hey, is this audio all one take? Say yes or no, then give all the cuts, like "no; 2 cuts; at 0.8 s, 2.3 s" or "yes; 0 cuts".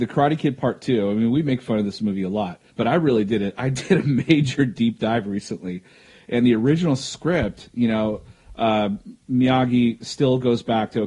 no; 1 cut; at 2.7 s